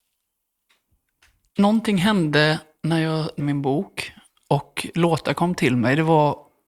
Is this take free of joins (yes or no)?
no